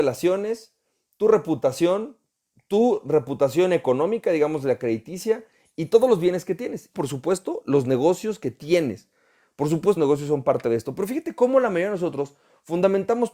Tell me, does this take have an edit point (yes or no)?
yes